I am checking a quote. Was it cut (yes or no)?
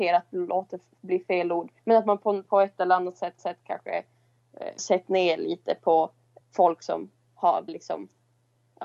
yes